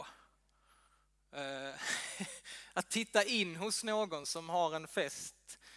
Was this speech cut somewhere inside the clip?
no; 0 cuts

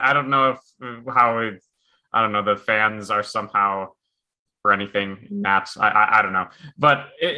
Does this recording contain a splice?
yes; 1 cut; at 4.6 s

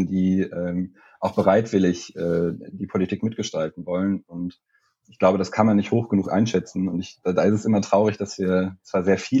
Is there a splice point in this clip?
no; 0 cuts

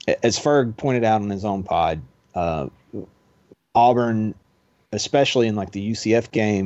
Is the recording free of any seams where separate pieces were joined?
yes; 0 cuts

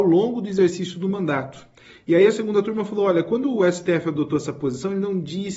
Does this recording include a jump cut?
no; 0 cuts

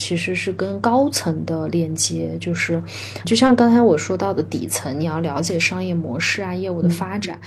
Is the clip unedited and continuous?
no; 1 cut; at 3.2 s

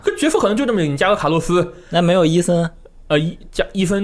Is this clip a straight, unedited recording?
yes; 0 cuts

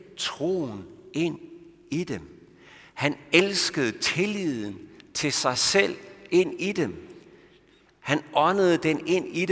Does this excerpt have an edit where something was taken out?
no; 0 cuts

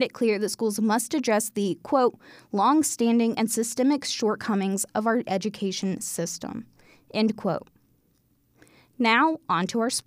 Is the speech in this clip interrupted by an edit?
no; 0 cuts

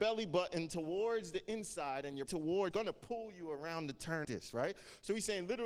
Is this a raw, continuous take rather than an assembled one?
no; 3 cuts; at 2.3 s, 2.7 s, 4.2 s

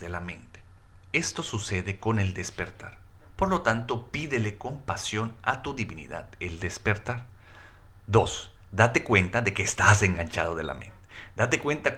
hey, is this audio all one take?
yes; 0 cuts

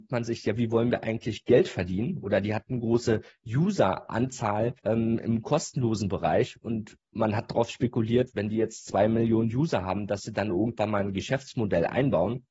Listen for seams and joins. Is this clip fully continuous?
no; 1 cut; at 4.8 s

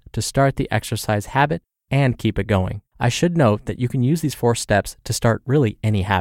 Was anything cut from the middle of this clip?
yes; 1 cut; at 2.9 s

